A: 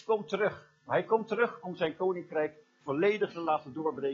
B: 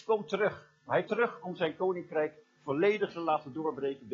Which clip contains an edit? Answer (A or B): B